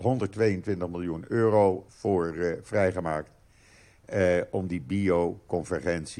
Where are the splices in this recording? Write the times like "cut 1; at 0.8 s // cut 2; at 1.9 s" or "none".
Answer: cut 1; at 1.9 s